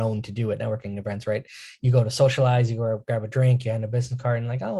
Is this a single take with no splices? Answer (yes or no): yes